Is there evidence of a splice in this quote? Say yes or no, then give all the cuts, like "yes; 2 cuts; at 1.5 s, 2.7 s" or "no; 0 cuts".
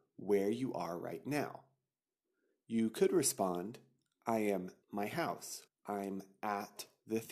yes; 2 cuts; at 4.8 s, 5.7 s